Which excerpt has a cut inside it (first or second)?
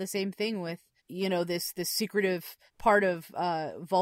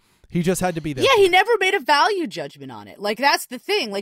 first